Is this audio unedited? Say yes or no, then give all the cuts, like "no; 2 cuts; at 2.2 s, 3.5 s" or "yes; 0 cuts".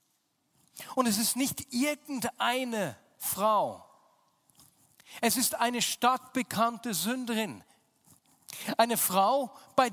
yes; 0 cuts